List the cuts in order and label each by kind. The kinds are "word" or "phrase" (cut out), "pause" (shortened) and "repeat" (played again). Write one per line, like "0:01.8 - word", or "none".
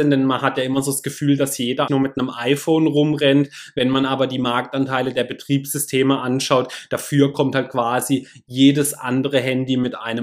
0:01.9 - word